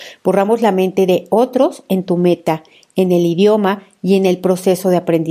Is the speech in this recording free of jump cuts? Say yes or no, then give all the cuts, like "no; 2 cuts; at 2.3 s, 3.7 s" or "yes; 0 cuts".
yes; 0 cuts